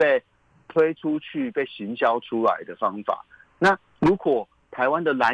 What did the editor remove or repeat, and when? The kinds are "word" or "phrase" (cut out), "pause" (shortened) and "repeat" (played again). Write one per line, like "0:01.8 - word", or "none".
none